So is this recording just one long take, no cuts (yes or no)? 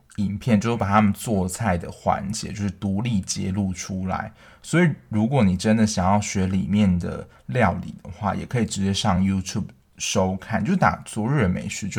yes